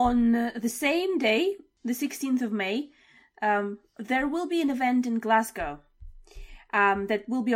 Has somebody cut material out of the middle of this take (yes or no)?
no